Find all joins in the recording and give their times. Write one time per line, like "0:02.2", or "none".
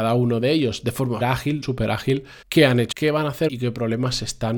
0:01.2
0:01.6
0:02.4
0:02.9
0:03.5